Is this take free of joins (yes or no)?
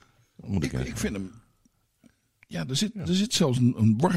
yes